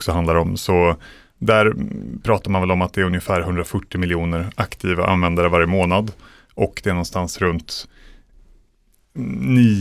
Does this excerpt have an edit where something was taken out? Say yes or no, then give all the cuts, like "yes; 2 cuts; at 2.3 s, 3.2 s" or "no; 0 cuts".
no; 0 cuts